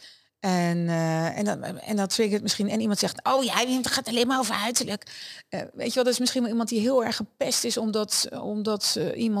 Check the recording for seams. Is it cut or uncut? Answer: uncut